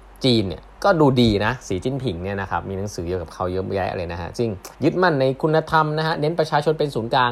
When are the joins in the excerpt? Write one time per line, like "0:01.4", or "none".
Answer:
0:04.7